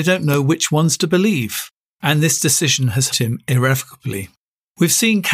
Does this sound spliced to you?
yes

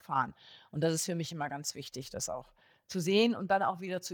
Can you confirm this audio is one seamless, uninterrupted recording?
yes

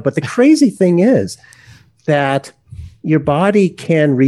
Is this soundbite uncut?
yes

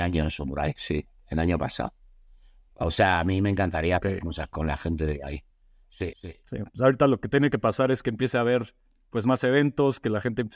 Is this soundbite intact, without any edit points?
yes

